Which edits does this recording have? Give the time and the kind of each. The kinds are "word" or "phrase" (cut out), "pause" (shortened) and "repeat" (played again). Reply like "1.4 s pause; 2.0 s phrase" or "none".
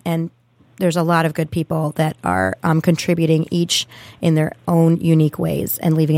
none